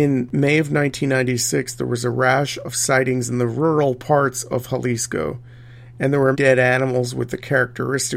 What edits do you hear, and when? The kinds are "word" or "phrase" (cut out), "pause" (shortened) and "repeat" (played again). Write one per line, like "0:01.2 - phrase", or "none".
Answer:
0:06.3 - word